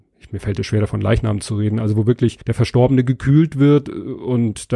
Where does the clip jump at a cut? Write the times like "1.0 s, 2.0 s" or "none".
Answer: 2.4 s